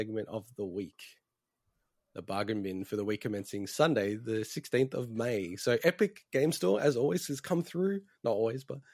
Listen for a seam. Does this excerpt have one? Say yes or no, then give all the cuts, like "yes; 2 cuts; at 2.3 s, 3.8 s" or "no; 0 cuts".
no; 0 cuts